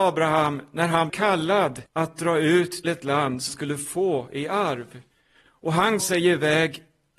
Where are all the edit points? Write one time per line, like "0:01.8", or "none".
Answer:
0:01.1
0:01.9
0:02.8
0:03.5
0:05.1
0:06.0